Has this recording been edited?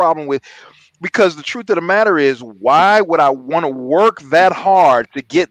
no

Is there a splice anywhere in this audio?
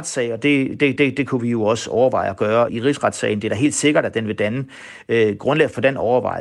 yes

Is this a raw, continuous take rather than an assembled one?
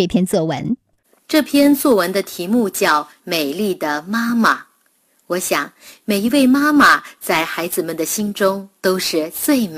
yes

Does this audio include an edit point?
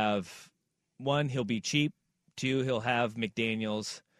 no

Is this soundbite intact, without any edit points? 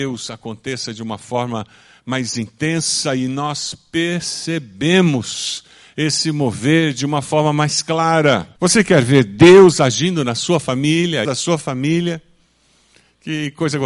no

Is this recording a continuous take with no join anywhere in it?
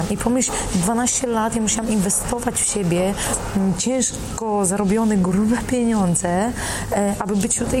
yes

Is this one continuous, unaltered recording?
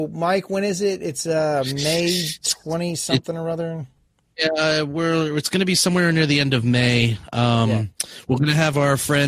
yes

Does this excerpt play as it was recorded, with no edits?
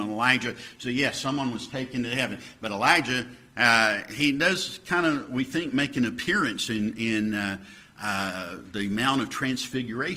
yes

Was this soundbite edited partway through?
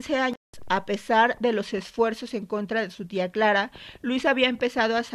no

